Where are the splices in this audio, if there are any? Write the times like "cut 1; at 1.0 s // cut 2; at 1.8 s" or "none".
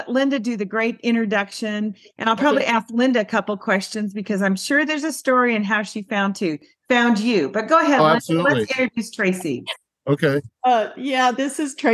none

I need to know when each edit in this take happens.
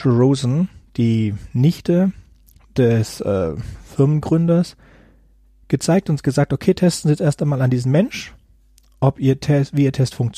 none

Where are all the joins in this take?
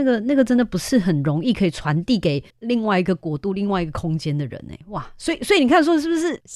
cut 1; at 2.5 s

